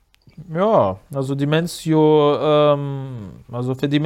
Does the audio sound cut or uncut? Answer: uncut